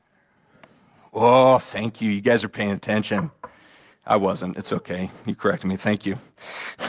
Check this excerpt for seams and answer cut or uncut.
uncut